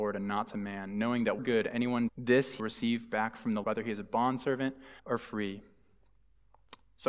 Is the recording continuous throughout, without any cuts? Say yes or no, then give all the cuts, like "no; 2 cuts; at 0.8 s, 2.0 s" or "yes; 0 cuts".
no; 5 cuts; at 1.4 s, 2.1 s, 2.6 s, 3.6 s, 5.0 s